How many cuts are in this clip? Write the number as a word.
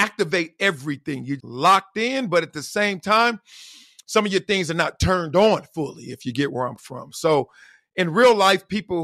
two